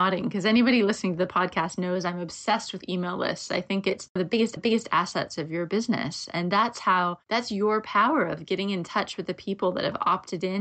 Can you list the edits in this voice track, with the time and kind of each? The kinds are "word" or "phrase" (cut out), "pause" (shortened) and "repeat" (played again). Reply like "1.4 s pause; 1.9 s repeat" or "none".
4.2 s phrase; 4.6 s repeat